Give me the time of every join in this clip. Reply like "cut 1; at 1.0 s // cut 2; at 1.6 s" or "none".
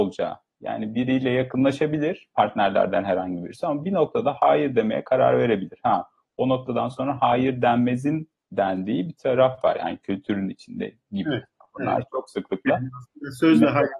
none